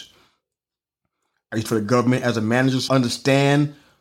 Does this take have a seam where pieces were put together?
yes; 2 cuts; at 1.7 s, 2.9 s

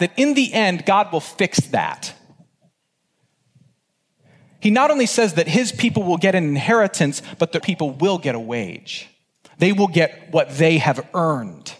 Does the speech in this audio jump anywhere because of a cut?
yes; 2 cuts; at 7.6 s, 9.2 s

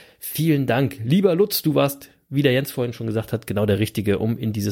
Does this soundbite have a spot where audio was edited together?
no; 0 cuts

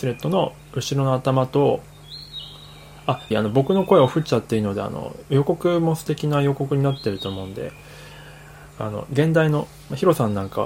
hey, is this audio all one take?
no; 1 cut; at 3.3 s

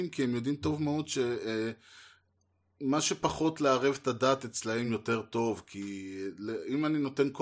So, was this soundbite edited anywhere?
no; 0 cuts

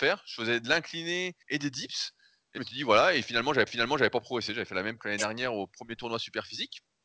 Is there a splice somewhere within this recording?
yes; 4 cuts; at 1.4 s, 2.6 s, 3.7 s, 5.0 s

